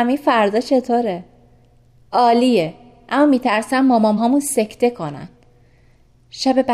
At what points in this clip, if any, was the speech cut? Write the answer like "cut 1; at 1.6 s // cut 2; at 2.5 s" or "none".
cut 1; at 4.2 s